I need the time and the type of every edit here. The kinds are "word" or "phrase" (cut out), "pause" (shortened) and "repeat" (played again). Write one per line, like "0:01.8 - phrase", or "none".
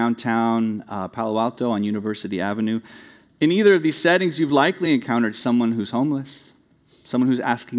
none